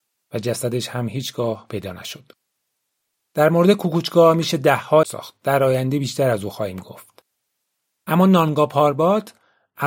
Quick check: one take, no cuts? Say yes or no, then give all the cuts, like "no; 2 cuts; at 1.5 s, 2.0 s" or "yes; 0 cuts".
no; 1 cut; at 5.0 s